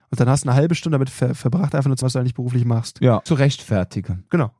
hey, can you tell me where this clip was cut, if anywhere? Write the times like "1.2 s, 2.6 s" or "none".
1.1 s, 2.0 s, 3.3 s